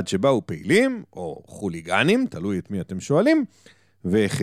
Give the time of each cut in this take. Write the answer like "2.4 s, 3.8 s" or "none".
none